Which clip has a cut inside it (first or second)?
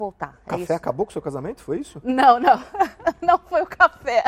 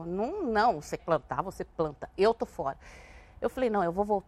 second